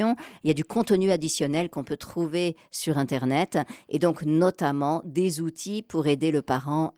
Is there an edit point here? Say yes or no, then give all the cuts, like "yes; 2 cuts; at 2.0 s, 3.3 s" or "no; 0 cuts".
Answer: no; 0 cuts